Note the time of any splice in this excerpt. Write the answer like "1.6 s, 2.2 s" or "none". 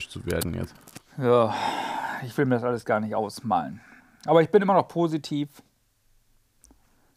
4.0 s

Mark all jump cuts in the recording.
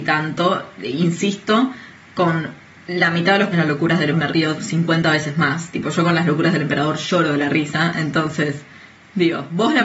3.5 s, 4.1 s

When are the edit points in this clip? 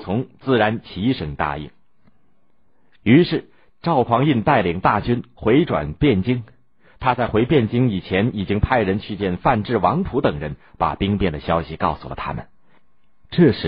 none

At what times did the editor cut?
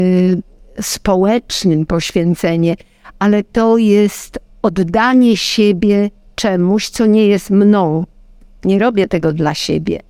none

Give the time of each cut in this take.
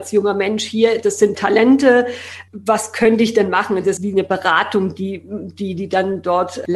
1.3 s, 2.5 s, 4.0 s

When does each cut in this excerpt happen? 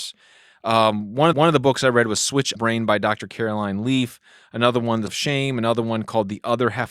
1.3 s, 2.5 s, 5.1 s

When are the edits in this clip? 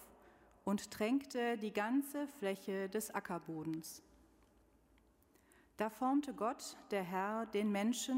none

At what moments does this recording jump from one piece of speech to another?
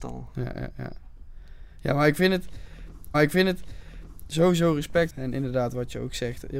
3.1 s, 5.1 s

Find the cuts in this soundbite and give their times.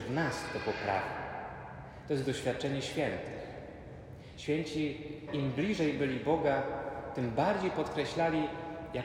5.3 s

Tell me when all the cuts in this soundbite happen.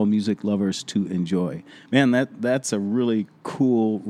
none

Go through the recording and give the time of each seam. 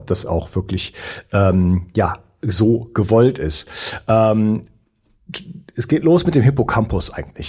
none

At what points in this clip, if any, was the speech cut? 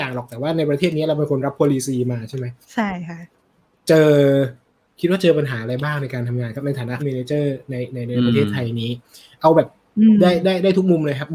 2.6 s, 3.5 s, 7.0 s

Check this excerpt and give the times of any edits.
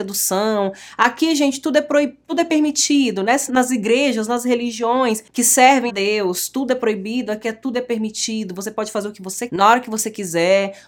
3.5 s, 5.9 s, 9.5 s

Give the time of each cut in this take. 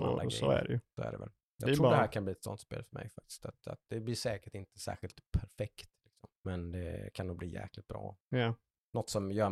6.4 s, 8.2 s

